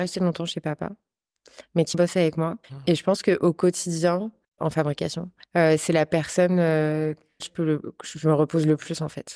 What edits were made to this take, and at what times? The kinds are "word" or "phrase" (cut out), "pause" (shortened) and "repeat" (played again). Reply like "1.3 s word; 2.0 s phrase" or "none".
1.9 s word; 2.6 s pause; 4.6 s word; 5.4 s pause; 7.4 s phrase